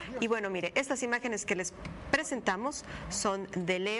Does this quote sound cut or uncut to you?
uncut